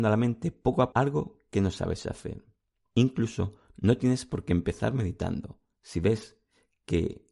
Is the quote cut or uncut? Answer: cut